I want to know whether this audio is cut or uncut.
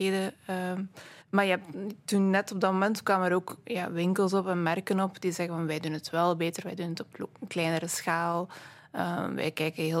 cut